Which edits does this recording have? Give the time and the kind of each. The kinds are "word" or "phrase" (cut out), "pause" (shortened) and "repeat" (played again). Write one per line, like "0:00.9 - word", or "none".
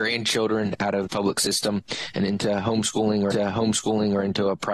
0:01.1 - word
0:03.3 - repeat